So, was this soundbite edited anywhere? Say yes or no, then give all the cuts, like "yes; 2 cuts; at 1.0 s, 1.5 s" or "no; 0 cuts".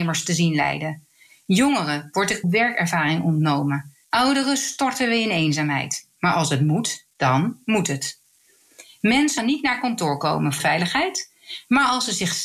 yes; 5 cuts; at 2.4 s, 4.0 s, 7.1 s, 9.4 s, 10.6 s